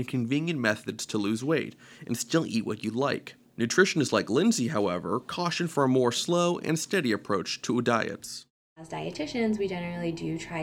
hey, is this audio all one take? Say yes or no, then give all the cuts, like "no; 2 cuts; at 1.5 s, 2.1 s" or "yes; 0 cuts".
yes; 0 cuts